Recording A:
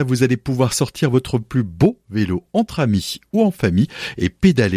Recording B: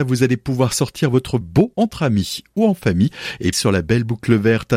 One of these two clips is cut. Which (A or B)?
B